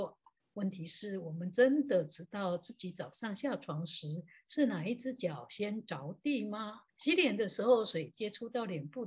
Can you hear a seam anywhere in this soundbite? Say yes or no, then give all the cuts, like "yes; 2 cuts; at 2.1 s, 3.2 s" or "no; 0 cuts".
yes; 1 cut; at 6.9 s